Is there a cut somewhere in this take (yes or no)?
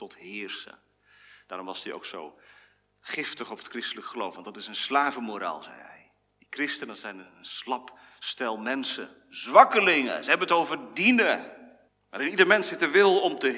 yes